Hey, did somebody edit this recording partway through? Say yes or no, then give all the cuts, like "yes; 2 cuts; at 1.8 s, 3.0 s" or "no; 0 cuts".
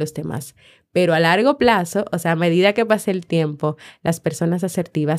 no; 0 cuts